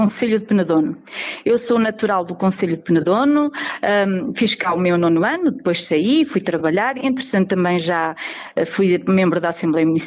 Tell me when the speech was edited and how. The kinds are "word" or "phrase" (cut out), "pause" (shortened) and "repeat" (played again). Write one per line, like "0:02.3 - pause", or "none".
none